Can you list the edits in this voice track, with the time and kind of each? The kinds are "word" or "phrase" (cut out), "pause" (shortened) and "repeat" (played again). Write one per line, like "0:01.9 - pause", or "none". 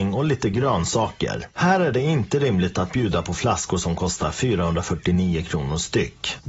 none

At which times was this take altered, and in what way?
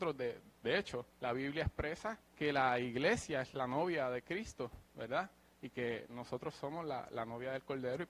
0:01.1 - pause
0:02.3 - pause

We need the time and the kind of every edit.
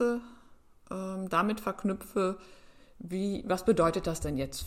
none

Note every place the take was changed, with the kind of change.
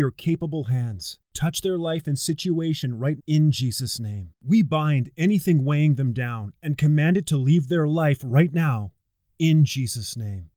0:01.3 - pause
0:03.2 - word
0:04.4 - pause

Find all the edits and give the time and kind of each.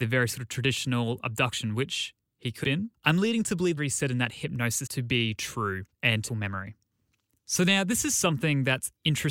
0:02.6 - word
0:03.8 - phrase
0:04.9 - word
0:06.3 - phrase

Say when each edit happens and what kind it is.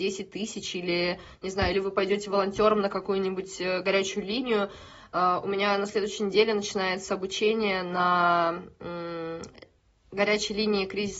none

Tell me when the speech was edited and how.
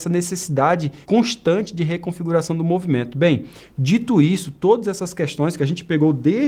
0:01.0 - pause

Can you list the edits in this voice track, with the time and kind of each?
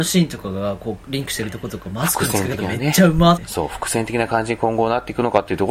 0:03.4 - word

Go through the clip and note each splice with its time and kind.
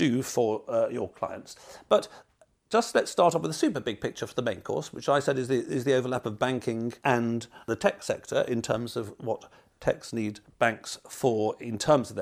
0:07.0 - pause

